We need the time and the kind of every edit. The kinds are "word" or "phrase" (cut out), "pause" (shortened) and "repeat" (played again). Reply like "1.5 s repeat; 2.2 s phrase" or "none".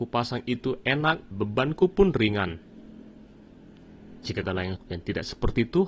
1.3 s word; 4.4 s word; 4.8 s word